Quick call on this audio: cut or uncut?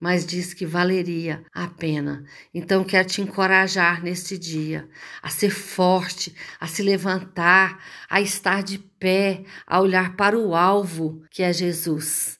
cut